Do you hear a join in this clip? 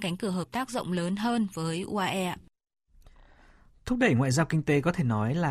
no; 0 cuts

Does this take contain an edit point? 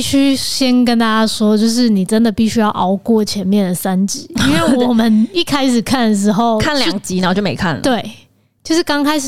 no; 0 cuts

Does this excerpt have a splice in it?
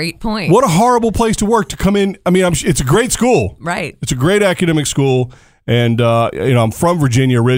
no; 0 cuts

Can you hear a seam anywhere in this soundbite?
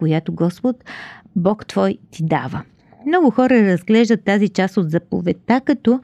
no; 0 cuts

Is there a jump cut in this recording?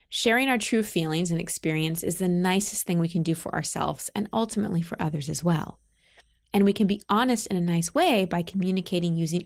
no; 0 cuts

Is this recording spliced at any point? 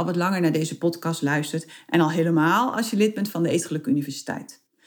no; 0 cuts

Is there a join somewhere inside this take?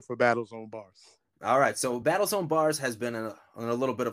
no; 0 cuts

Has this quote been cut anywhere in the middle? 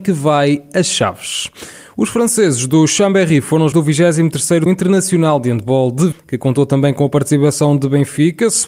yes; 3 cuts; at 3.7 s, 4.7 s, 6.1 s

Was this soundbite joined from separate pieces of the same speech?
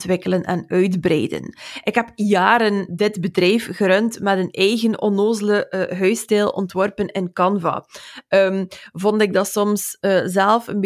yes; 1 cut; at 2.9 s

